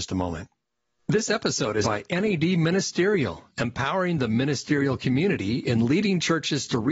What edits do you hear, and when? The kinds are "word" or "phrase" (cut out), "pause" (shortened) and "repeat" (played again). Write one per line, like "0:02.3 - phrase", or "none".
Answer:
0:01.8 - word